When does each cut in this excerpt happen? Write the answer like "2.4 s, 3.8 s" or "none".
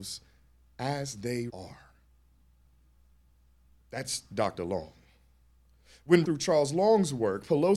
1.5 s, 6.2 s